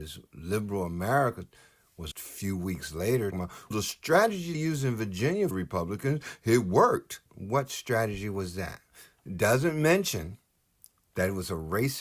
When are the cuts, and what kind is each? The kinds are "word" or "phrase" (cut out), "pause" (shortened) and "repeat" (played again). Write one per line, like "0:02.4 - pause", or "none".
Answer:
0:02.1 - phrase
0:03.3 - word
0:03.7 - word
0:04.5 - word
0:05.5 - phrase
0:07.3 - pause